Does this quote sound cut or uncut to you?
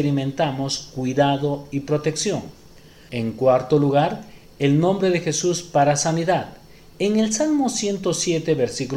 uncut